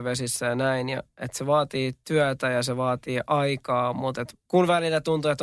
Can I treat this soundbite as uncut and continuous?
no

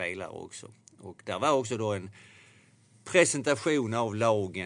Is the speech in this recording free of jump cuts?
yes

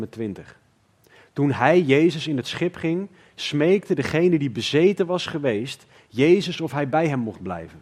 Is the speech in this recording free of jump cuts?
yes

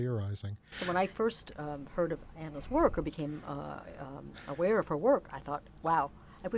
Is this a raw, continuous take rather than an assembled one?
yes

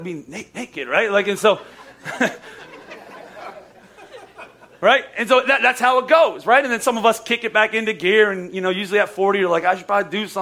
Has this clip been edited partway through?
no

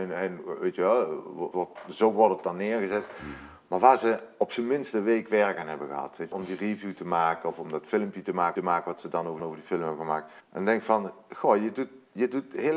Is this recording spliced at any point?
yes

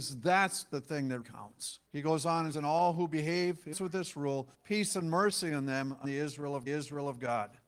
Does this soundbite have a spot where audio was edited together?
yes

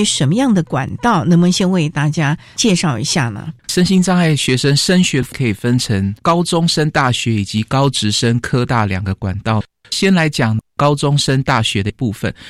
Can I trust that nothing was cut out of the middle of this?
no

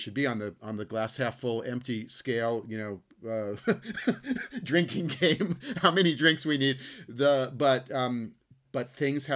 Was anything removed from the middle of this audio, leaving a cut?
no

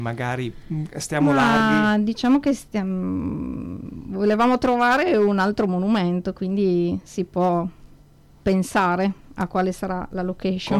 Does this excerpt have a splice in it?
no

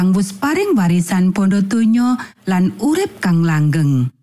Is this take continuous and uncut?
yes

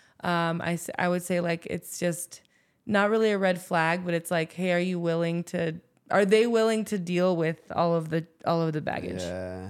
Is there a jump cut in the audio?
no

